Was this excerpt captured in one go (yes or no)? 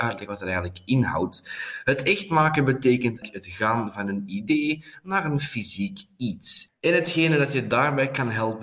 yes